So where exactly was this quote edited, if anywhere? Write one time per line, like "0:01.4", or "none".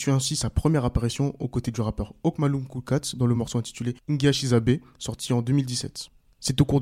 none